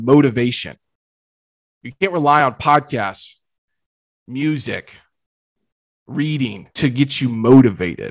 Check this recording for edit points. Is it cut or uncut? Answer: uncut